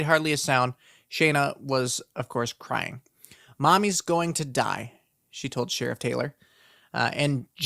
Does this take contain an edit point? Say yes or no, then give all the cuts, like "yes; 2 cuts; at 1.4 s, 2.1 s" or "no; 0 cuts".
no; 0 cuts